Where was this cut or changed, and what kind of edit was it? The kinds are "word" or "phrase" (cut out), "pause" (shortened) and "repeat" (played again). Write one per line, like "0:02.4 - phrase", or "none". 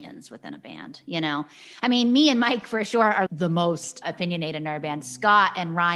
0:03.3 - word
0:04.0 - word